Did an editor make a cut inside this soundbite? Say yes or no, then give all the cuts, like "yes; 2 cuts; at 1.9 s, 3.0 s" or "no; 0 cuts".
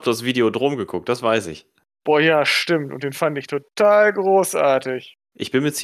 no; 0 cuts